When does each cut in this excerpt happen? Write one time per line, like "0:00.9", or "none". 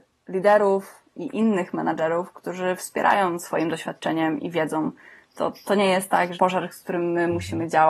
0:06.3